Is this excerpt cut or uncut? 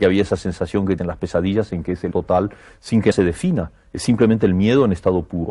cut